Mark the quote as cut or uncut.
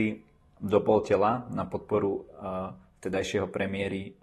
uncut